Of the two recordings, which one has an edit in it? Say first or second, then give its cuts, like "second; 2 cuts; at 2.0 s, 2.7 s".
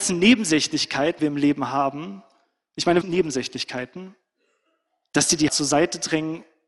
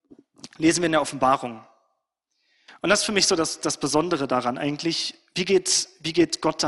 first; 3 cuts; at 1.2 s, 3.0 s, 5.5 s